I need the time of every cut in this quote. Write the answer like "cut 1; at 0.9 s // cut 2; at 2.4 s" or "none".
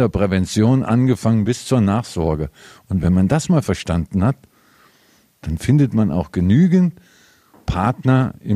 none